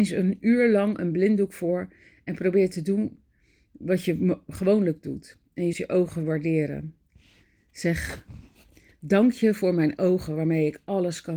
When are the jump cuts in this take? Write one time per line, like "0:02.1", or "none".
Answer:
0:05.7